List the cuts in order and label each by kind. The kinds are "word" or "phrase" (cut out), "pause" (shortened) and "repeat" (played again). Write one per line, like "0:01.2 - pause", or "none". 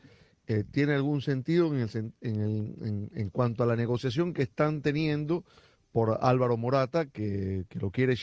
none